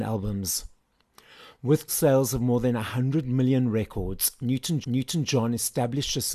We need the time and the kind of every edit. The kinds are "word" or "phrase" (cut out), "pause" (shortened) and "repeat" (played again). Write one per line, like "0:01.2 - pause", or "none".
0:01.9 - word
0:04.8 - repeat